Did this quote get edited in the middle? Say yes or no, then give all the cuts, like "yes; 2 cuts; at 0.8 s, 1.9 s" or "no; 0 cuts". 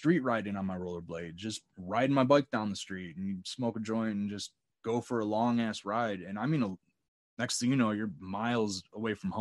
no; 0 cuts